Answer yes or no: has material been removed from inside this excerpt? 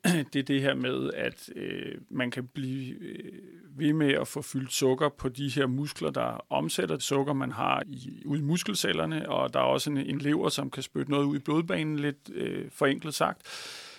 yes